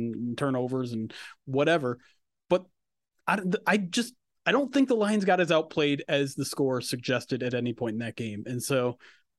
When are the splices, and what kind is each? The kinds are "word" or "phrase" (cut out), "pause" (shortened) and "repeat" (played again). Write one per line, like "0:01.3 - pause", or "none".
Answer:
none